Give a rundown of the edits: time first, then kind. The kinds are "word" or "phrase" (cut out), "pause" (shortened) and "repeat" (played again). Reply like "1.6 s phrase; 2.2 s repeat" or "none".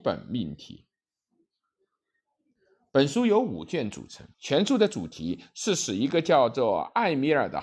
4.3 s pause